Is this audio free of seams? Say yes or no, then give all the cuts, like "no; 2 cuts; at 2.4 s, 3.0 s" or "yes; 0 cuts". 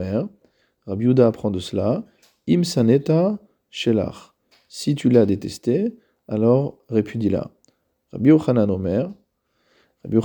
yes; 0 cuts